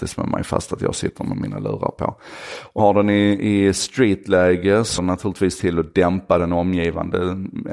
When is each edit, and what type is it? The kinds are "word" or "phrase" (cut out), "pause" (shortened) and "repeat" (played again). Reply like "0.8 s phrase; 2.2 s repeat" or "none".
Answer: 2.8 s word; 5.0 s word